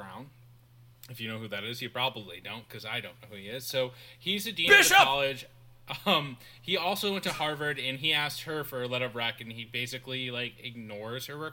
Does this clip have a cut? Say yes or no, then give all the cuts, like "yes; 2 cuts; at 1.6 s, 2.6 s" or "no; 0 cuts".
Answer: no; 0 cuts